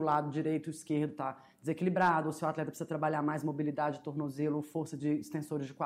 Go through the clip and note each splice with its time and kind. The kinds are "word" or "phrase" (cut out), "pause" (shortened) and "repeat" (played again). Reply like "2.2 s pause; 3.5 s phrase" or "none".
none